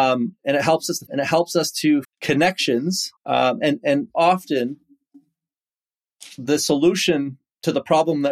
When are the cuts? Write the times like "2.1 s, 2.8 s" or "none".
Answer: 1.1 s, 2.0 s, 3.2 s, 4.1 s

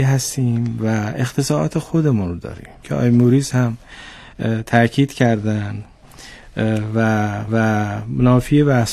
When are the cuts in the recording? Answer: 2.8 s, 7.5 s

